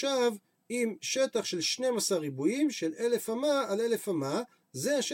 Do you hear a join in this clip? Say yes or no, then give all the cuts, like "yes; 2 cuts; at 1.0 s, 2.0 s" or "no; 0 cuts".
no; 0 cuts